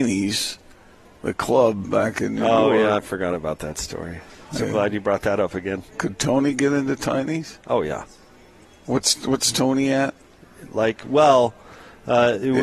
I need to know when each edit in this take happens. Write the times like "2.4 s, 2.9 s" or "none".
4.3 s, 5.9 s

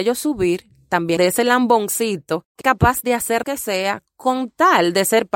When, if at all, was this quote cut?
1.2 s, 2.6 s, 3.4 s

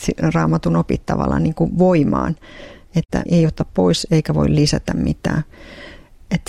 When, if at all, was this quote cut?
3.3 s

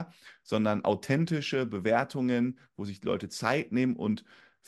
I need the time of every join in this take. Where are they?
none

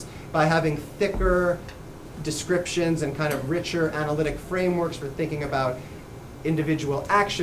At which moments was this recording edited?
none

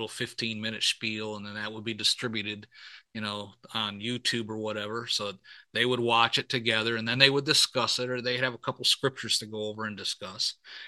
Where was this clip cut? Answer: none

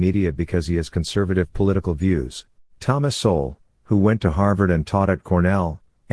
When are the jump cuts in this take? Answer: 2.6 s

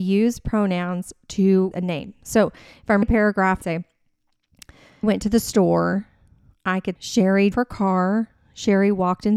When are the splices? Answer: 1.7 s, 3.0 s, 3.6 s, 5.0 s, 7.0 s, 7.5 s

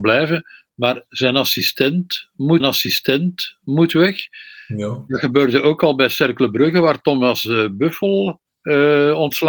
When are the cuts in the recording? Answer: 2.6 s, 8.5 s

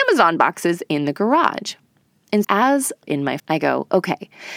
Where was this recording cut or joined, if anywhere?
2.4 s, 3.0 s, 3.4 s

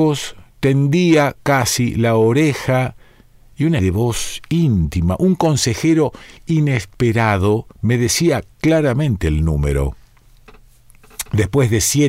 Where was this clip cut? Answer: 3.8 s, 7.7 s, 8.5 s

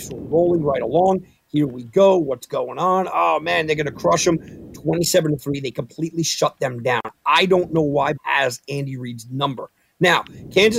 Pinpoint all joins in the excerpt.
8.2 s

